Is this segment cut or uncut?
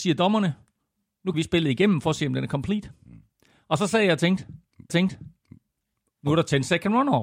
cut